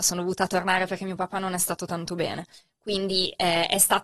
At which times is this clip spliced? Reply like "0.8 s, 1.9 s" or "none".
none